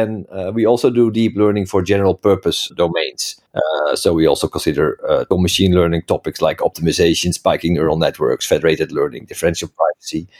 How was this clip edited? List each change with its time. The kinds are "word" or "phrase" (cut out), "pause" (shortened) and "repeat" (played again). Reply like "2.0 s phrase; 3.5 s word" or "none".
3.5 s pause; 5.3 s word